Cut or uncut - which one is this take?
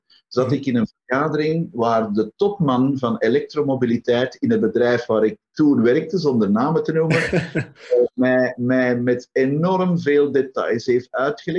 uncut